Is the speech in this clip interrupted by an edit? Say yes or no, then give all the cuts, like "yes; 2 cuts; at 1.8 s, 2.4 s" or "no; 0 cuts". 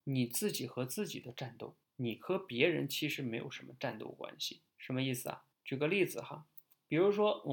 yes; 3 cuts; at 1.8 s, 4.7 s, 5.5 s